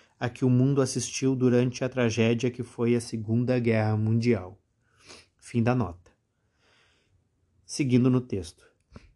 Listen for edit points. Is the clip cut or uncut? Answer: uncut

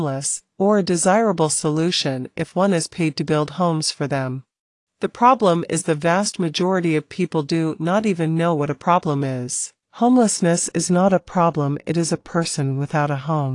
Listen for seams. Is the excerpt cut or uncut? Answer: cut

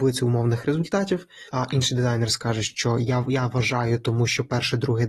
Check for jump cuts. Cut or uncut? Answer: cut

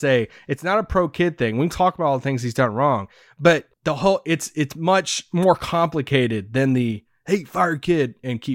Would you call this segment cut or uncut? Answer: cut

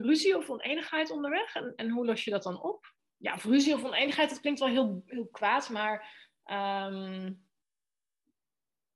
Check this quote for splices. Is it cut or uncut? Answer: uncut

